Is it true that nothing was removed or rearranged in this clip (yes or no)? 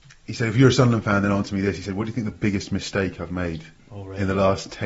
yes